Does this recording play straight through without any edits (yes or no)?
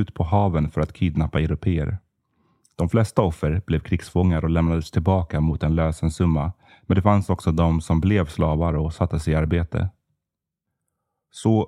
yes